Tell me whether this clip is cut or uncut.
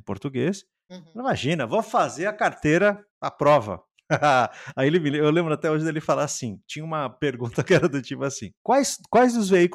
cut